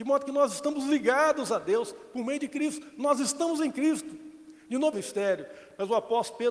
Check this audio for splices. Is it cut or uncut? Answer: cut